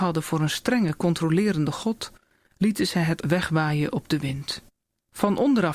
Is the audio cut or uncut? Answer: cut